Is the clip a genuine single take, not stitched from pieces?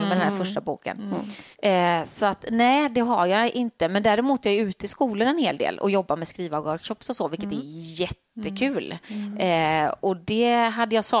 no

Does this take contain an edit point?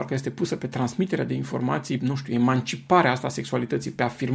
yes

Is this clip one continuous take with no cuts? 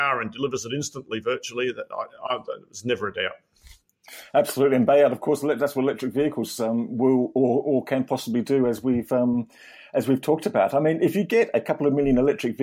yes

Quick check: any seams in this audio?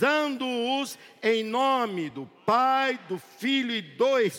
no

